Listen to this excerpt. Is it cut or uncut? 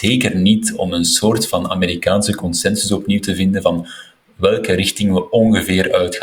uncut